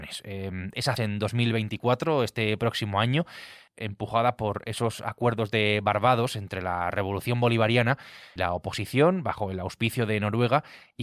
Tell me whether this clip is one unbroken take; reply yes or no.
no